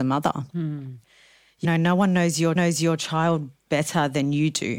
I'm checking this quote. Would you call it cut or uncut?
cut